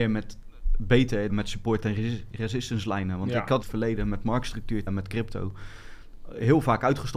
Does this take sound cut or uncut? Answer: cut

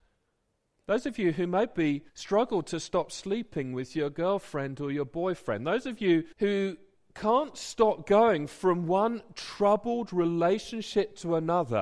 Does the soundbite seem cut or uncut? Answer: cut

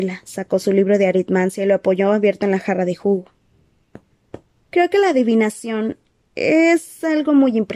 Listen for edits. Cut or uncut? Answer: uncut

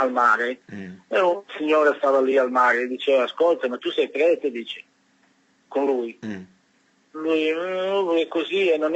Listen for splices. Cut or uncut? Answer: uncut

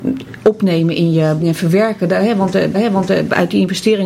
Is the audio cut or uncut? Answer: cut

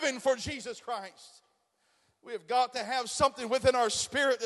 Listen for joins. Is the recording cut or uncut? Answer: uncut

